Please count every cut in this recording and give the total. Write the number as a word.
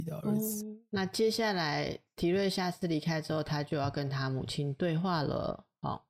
zero